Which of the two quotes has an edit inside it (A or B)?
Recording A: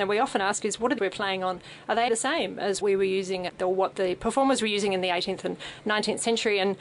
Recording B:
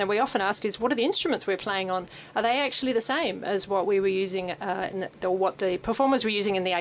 A